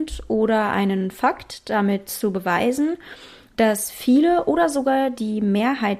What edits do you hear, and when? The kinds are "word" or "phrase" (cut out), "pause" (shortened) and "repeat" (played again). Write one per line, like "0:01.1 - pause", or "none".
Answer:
none